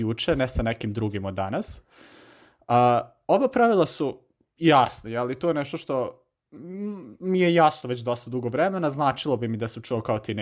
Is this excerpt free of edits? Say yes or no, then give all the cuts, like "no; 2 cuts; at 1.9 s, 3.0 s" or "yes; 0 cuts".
yes; 0 cuts